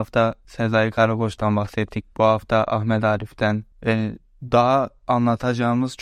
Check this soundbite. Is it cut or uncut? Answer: uncut